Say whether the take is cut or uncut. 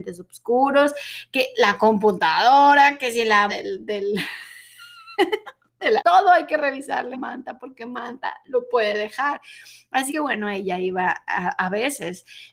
cut